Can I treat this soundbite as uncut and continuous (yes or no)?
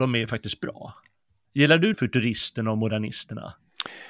no